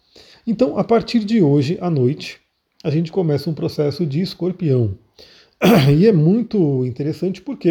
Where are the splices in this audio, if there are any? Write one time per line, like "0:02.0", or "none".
none